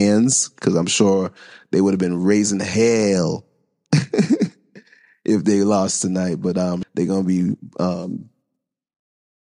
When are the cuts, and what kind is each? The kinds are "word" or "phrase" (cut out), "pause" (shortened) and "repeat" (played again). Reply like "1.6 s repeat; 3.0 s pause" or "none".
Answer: 6.8 s word